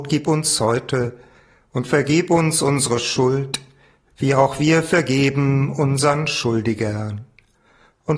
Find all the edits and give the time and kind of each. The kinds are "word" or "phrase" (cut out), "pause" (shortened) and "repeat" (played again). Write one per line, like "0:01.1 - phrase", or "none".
none